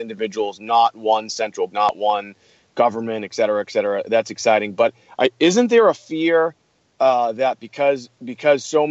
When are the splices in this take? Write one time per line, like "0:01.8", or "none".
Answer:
0:01.7